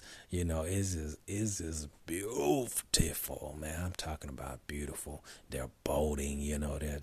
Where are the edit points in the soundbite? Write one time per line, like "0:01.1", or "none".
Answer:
0:02.0